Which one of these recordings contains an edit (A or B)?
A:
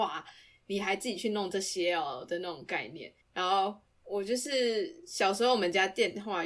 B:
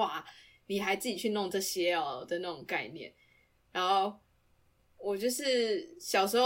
A